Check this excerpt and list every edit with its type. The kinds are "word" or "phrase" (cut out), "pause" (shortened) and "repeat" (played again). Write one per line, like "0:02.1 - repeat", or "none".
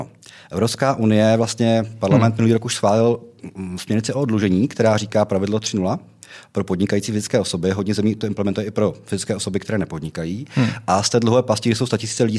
none